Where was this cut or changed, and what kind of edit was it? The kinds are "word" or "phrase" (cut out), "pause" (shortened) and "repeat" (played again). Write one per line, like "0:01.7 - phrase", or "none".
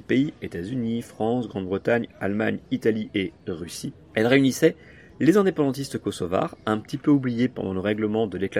none